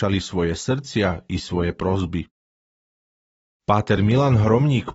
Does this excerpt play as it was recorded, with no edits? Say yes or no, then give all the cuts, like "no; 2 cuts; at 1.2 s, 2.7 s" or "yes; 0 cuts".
yes; 0 cuts